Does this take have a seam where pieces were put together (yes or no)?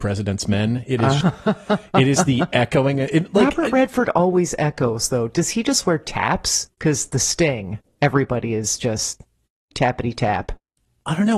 yes